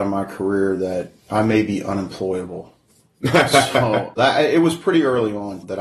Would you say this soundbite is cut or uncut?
cut